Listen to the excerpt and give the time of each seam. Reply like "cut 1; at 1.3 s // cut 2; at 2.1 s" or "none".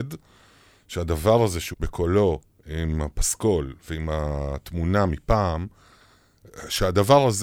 cut 1; at 1.7 s

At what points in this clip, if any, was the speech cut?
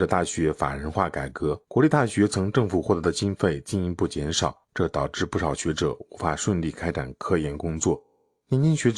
cut 1; at 1.6 s // cut 2; at 4.6 s

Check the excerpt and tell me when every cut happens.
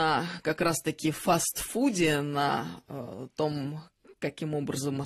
none

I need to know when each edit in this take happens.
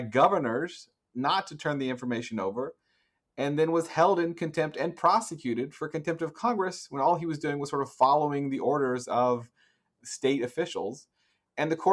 none

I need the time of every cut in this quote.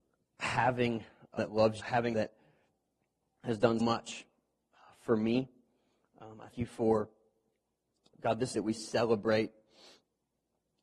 cut 1; at 1.4 s // cut 2; at 1.8 s // cut 3; at 2.1 s // cut 4; at 3.8 s // cut 5; at 6.5 s // cut 6; at 8.1 s // cut 7; at 8.5 s

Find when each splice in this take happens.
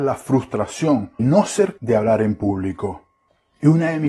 cut 1; at 1.2 s // cut 2; at 1.8 s

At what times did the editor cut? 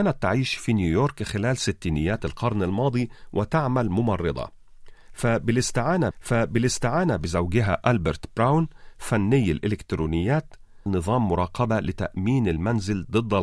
cut 1; at 6.1 s // cut 2; at 10.9 s

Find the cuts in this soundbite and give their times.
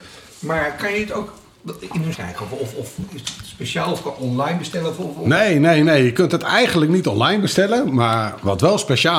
cut 1; at 2.1 s

